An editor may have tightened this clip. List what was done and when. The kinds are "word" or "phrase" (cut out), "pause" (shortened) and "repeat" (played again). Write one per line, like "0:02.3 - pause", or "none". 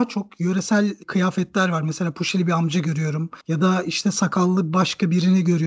0:01.0 - word
0:03.4 - pause